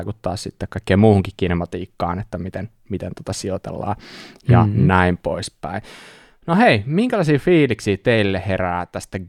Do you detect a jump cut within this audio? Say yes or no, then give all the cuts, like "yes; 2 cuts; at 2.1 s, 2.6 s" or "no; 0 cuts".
no; 0 cuts